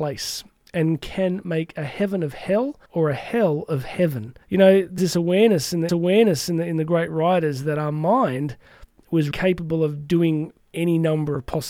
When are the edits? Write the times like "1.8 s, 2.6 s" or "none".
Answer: 2.9 s, 4.4 s, 5.0 s, 5.9 s, 9.3 s